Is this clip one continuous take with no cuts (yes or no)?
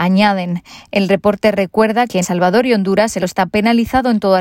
no